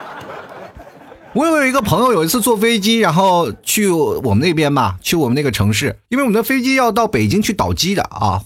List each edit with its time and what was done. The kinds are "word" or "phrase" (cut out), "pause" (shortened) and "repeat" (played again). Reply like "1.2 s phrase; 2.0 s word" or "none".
6.0 s pause